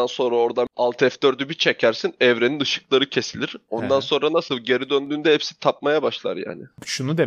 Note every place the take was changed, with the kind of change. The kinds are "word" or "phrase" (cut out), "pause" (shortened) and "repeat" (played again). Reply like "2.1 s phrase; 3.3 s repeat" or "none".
none